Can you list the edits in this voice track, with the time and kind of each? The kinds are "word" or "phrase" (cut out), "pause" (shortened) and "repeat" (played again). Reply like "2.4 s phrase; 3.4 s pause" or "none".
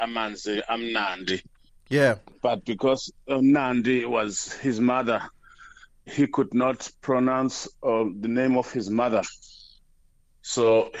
none